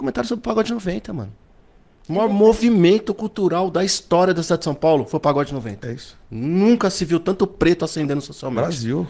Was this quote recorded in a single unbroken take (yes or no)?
yes